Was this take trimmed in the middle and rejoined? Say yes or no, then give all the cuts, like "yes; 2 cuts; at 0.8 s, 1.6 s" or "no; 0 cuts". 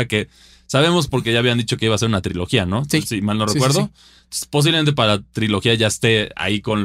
no; 0 cuts